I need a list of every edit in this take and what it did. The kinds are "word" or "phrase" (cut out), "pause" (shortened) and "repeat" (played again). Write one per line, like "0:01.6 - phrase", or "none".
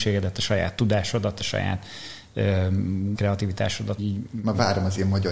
0:03.1 - word
0:04.0 - word